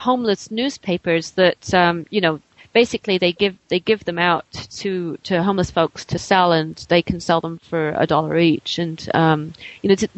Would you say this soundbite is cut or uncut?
uncut